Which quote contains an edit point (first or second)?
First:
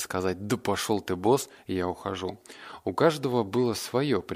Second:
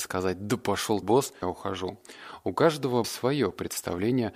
second